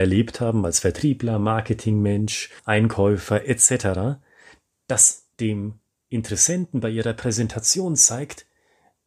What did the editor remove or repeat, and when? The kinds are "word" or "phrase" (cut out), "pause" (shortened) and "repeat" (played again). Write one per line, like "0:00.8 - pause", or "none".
0:02.6 - pause
0:05.3 - pause